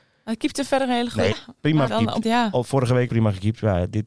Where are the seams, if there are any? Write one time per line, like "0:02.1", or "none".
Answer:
0:01.3
0:01.9
0:02.2
0:03.1